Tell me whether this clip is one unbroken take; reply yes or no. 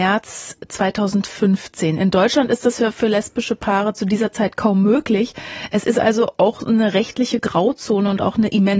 yes